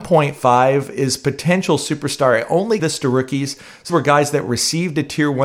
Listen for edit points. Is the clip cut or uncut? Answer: cut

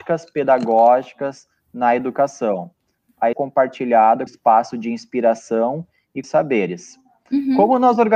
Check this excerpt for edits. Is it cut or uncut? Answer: cut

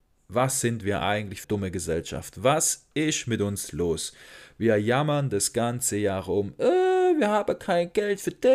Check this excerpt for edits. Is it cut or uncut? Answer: cut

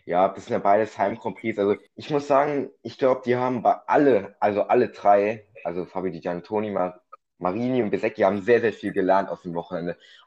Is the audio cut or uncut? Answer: cut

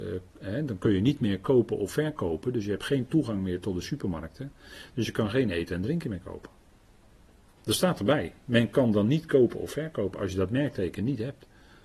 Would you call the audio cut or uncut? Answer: uncut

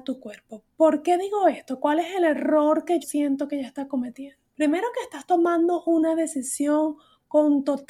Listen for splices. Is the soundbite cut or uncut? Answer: cut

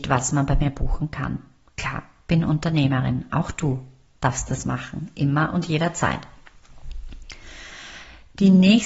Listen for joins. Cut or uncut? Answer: uncut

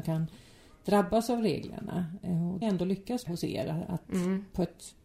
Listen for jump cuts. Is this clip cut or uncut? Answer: cut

